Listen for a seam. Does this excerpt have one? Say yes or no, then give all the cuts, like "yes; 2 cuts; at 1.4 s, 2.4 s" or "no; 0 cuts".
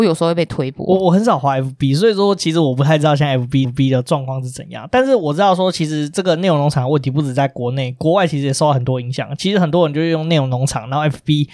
yes; 1 cut; at 3.6 s